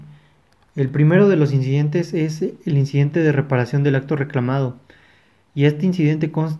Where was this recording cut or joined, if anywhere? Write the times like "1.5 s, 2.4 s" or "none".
none